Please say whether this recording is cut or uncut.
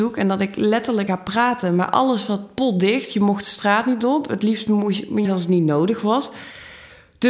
cut